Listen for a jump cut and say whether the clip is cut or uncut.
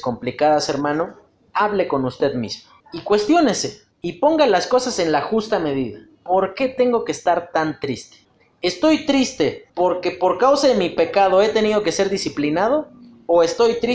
cut